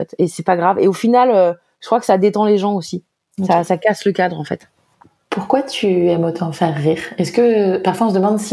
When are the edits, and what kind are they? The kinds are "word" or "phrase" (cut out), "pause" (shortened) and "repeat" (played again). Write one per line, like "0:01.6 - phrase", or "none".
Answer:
none